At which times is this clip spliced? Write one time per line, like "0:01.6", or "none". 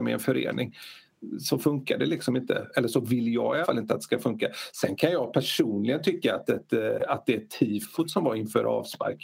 0:03.6